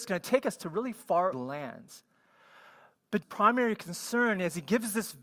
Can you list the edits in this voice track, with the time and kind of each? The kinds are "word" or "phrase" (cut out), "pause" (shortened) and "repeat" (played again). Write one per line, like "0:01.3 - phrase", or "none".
0:01.3 - word
0:03.2 - word

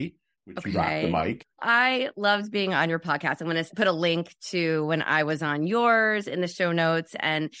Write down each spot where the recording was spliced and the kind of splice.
none

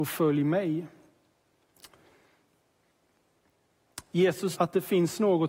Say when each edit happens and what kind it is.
0:04.5 - word

